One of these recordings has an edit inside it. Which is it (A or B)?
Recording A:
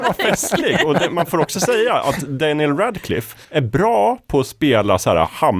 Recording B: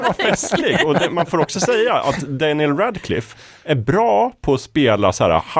A